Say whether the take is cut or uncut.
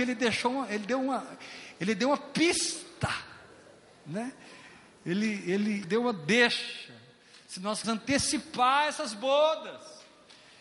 cut